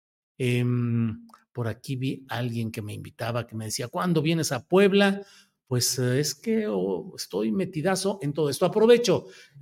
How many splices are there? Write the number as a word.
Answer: zero